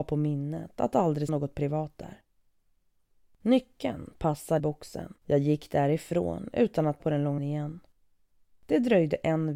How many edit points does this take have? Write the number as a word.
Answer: five